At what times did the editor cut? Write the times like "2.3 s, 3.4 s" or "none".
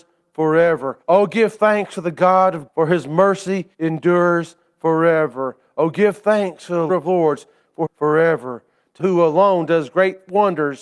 1.0 s, 2.7 s, 3.7 s, 6.9 s, 7.8 s, 9.0 s